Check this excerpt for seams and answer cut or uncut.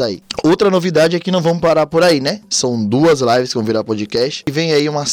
uncut